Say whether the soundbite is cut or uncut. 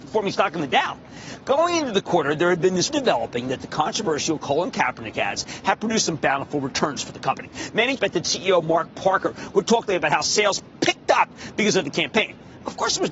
cut